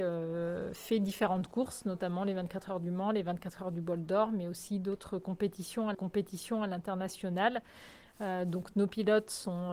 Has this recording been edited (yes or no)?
yes